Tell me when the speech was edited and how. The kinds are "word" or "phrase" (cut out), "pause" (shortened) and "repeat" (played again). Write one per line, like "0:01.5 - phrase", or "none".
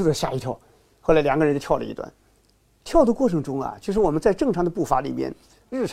none